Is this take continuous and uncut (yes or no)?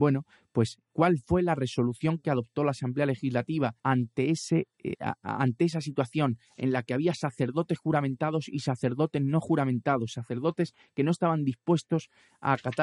no